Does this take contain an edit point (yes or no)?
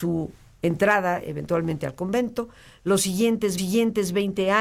yes